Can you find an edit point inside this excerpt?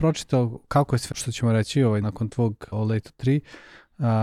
yes; 3 cuts; at 1.1 s, 2.0 s, 2.7 s

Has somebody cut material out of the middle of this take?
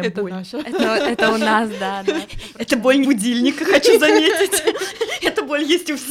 yes; 1 cut; at 3.0 s

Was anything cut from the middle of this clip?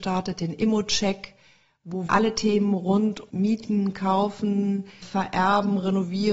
yes; 3 cuts; at 2.1 s, 3.3 s, 5.0 s

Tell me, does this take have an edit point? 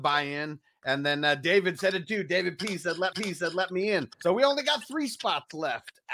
yes; 2 cuts; at 3.1 s, 4.1 s

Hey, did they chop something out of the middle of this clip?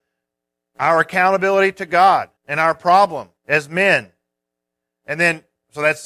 yes; 2 cuts; at 2.4 s, 3.4 s

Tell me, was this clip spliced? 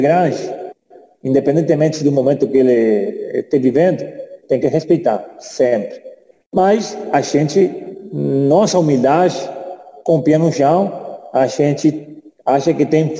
no; 0 cuts

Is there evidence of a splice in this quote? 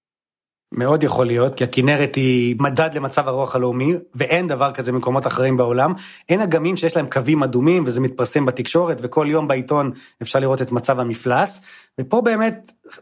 no; 0 cuts

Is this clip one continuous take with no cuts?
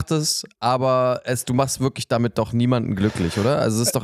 yes; 0 cuts

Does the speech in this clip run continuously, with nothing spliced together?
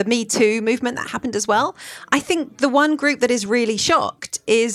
yes; 0 cuts

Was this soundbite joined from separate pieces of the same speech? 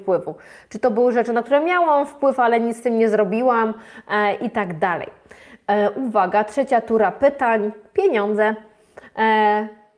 no; 0 cuts

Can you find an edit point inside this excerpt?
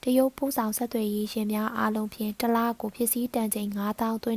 no; 0 cuts

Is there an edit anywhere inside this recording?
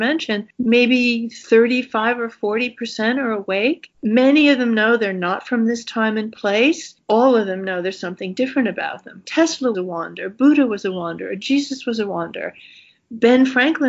yes; 1 cut; at 9.7 s

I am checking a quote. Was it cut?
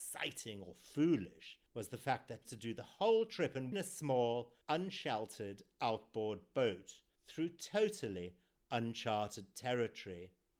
yes; 5 cuts; at 1.7 s, 2.4 s, 3.7 s, 4.6 s, 7.2 s

